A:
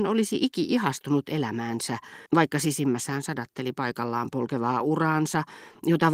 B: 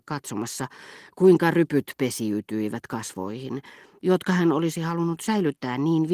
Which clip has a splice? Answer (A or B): A